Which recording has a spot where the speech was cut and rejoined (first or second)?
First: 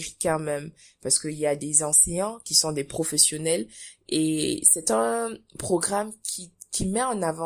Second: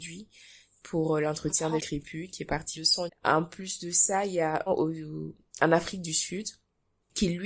second